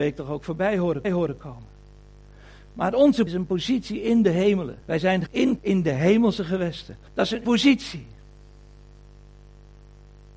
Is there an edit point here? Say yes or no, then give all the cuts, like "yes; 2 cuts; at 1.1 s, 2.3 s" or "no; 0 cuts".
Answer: yes; 7 cuts; at 1.0 s, 3.3 s, 4.8 s, 5.3 s, 5.6 s, 7.1 s, 7.4 s